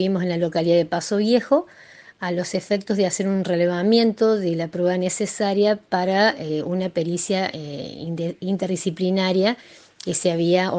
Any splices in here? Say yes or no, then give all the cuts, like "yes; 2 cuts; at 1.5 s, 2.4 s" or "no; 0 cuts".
no; 0 cuts